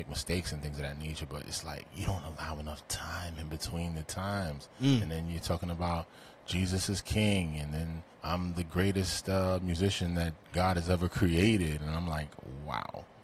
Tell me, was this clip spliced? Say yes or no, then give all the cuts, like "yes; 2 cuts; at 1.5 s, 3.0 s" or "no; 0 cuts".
yes; 1 cut; at 8.1 s